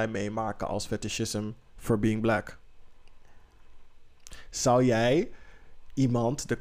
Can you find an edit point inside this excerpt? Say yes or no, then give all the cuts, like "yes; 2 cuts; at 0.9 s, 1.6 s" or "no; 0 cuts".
no; 0 cuts